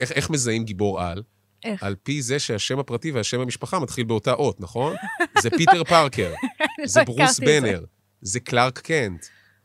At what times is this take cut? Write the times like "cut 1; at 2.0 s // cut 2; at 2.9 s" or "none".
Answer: none